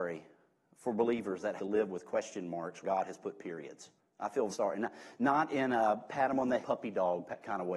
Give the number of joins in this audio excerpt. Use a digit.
5